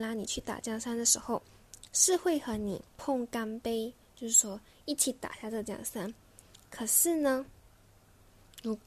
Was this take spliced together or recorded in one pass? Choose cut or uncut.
cut